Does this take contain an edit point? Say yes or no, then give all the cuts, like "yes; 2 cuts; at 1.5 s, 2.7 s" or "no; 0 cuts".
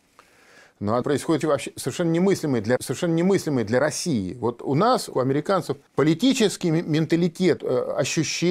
yes; 6 cuts; at 1.0 s, 1.4 s, 2.8 s, 5.1 s, 5.9 s, 7.6 s